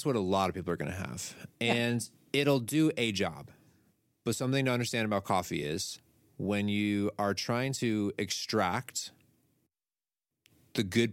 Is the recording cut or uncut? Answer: uncut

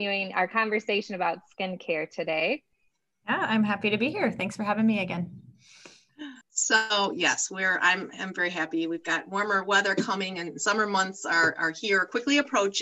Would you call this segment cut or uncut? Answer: cut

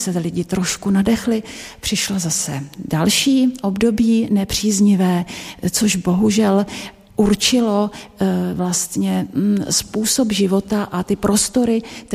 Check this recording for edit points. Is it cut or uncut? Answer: uncut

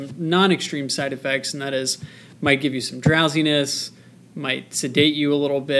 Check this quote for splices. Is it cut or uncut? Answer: uncut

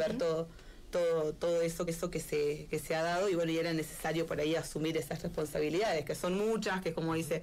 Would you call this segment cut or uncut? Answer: cut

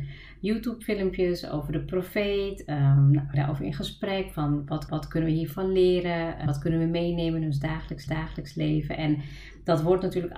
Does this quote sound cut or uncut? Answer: cut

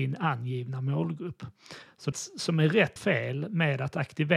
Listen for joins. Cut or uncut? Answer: cut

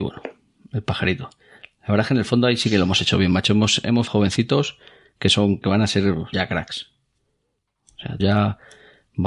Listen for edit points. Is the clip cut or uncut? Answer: cut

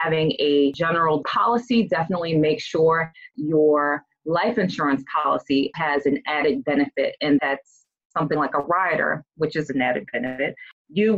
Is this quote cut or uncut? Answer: cut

